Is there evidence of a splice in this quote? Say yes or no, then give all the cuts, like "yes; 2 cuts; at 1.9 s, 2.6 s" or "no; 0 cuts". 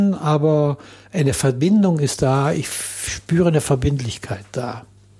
no; 0 cuts